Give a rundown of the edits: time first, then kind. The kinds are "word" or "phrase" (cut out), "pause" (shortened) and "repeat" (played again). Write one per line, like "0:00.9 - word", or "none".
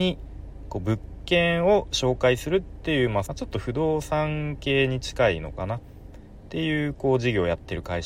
0:03.3 - phrase